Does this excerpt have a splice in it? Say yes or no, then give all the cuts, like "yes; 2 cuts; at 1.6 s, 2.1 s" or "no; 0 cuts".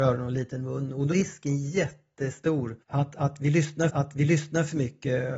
yes; 3 cuts; at 1.1 s, 2.8 s, 3.9 s